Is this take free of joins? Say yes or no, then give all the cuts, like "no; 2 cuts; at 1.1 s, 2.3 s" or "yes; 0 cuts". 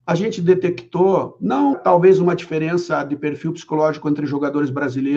no; 1 cut; at 1.7 s